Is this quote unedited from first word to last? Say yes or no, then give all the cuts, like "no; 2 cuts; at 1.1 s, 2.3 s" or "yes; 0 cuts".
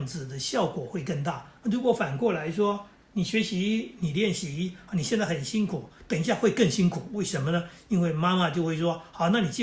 no; 1 cut; at 1.6 s